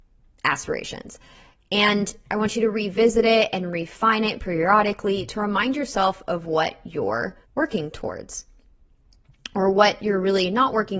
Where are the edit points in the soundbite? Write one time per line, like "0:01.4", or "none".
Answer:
0:07.4